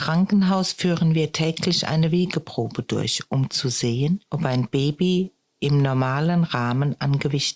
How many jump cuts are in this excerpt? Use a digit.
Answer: 0